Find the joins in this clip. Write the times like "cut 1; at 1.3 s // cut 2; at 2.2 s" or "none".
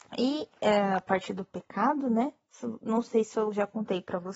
none